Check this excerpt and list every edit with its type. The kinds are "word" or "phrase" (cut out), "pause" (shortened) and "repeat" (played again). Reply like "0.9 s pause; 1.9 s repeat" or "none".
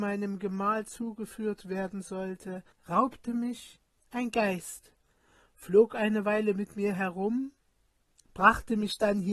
2.7 s pause